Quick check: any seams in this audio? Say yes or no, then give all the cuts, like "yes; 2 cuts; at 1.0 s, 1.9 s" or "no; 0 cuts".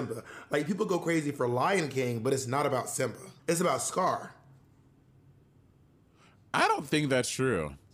yes; 1 cut; at 3.4 s